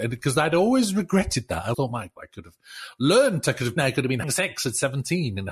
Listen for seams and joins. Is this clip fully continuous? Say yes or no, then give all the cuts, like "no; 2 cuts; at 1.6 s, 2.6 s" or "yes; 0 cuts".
no; 4 cuts; at 1.7 s, 2.2 s, 3.8 s, 4.2 s